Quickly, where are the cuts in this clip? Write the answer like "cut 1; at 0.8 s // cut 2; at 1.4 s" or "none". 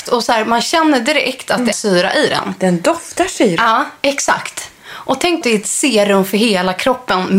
cut 1; at 1.7 s // cut 2; at 5.4 s